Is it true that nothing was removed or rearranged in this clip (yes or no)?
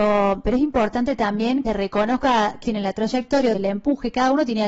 no